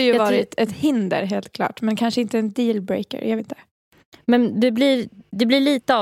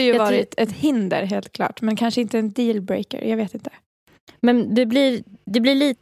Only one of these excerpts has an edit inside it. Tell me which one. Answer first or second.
first